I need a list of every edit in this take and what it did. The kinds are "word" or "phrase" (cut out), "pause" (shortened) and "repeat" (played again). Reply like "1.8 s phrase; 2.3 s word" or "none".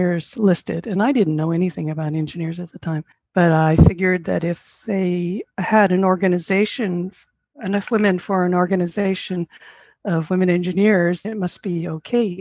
3.1 s pause; 11.2 s word